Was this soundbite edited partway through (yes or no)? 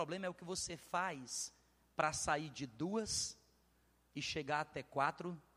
no